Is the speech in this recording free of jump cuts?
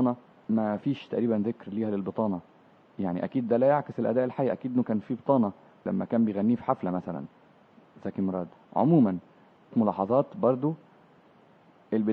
no; 1 cut; at 9.7 s

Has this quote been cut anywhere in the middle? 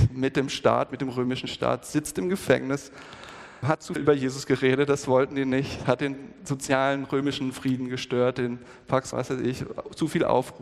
yes; 3 cuts; at 3.6 s, 4.0 s, 9.1 s

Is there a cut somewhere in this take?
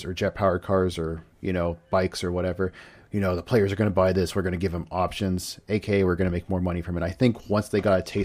no; 0 cuts

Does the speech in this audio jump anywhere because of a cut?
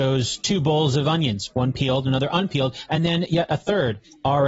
no; 0 cuts

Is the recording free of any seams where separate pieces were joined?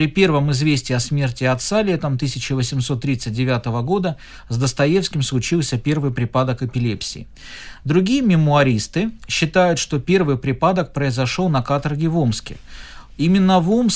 yes; 0 cuts

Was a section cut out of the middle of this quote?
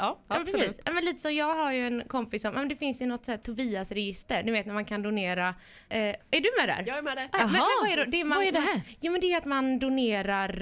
yes; 1 cut; at 5.8 s

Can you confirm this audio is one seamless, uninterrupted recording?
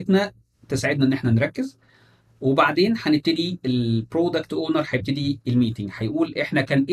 yes; 0 cuts

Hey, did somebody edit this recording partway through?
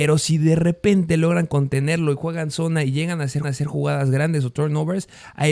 yes; 1 cut; at 3.4 s

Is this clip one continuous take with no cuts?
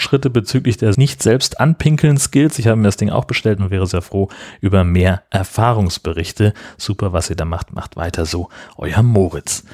no; 1 cut; at 0.9 s

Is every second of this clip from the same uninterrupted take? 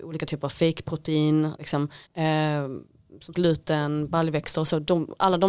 no; 3 cuts; at 1.6 s, 2.1 s, 3.3 s

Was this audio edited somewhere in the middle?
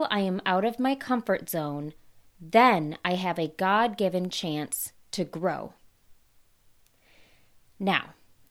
no; 0 cuts

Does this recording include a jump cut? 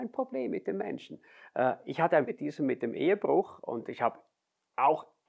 yes; 1 cut; at 2.3 s

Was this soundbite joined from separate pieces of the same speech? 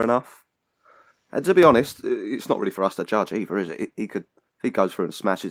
no; 0 cuts

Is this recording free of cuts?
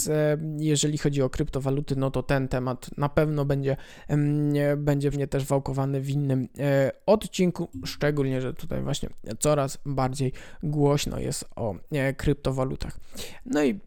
no; 1 cut; at 5.1 s

